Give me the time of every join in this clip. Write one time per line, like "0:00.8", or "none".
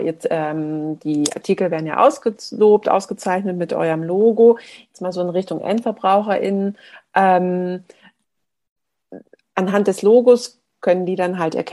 none